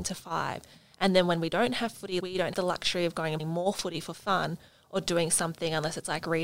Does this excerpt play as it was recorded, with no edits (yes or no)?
no